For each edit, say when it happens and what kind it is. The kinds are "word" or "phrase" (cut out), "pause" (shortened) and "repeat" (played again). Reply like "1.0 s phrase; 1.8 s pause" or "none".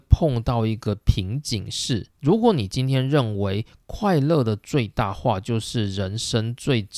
2.1 s pause